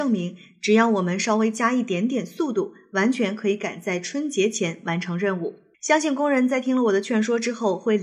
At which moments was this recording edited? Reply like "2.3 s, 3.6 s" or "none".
5.7 s